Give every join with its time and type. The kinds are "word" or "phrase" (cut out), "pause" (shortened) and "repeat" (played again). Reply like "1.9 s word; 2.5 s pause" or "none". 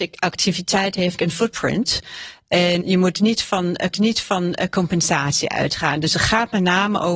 1.2 s word; 2.8 s word; 3.9 s repeat